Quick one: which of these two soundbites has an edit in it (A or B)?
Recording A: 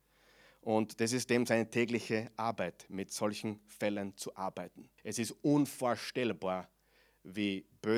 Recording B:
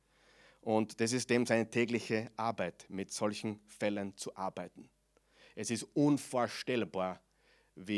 A